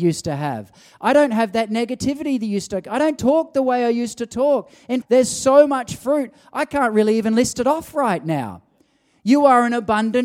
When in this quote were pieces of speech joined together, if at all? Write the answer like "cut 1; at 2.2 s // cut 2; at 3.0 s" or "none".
cut 1; at 5.0 s